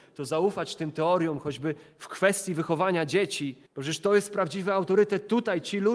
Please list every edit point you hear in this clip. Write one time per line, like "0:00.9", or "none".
0:03.7